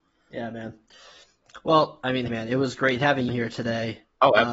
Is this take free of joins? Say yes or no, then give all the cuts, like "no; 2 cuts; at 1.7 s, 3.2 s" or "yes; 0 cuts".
no; 2 cuts; at 2.3 s, 3.3 s